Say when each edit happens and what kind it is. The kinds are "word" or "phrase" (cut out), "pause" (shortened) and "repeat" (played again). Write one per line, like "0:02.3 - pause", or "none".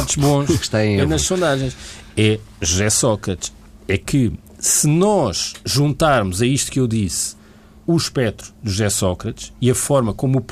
none